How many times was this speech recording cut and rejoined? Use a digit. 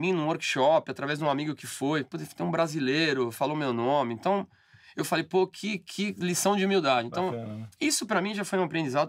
0